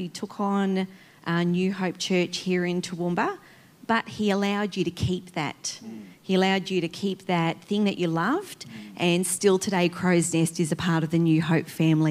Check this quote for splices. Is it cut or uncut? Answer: uncut